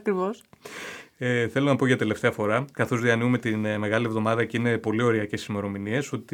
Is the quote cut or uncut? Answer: uncut